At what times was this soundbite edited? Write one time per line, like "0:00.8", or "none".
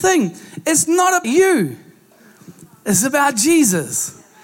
0:01.2